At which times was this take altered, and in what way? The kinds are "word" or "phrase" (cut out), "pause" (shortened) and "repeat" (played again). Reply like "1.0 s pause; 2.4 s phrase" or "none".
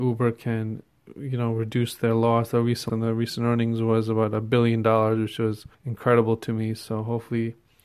2.9 s word; 5.7 s pause